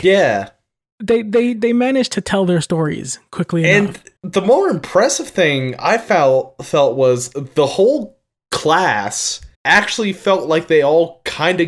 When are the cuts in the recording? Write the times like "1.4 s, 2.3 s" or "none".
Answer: 4.2 s, 9.5 s